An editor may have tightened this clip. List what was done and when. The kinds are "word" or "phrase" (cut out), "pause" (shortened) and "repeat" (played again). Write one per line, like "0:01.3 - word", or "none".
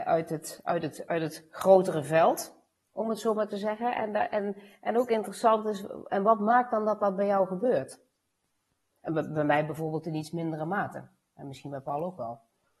none